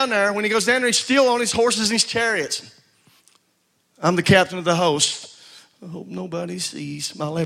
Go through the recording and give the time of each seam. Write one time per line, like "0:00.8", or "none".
none